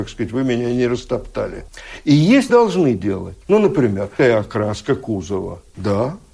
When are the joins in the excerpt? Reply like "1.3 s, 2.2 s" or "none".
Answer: 2.5 s, 3.4 s, 4.2 s